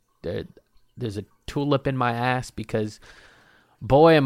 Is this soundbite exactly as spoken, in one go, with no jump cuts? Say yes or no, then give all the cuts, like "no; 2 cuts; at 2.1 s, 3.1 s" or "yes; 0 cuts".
yes; 0 cuts